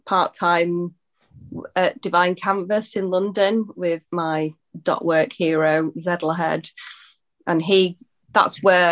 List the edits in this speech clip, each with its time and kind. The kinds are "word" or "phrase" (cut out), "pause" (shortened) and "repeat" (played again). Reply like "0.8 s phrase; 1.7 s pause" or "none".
4.1 s word